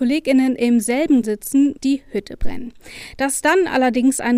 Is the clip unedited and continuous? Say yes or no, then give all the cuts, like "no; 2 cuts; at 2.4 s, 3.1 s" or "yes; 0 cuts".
no; 2 cuts; at 1.2 s, 1.8 s